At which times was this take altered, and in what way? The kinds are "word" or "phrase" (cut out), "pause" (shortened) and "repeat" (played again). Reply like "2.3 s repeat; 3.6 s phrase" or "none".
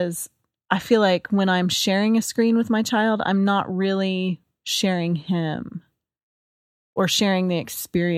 none